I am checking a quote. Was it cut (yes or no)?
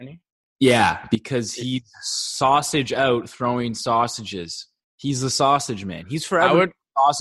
no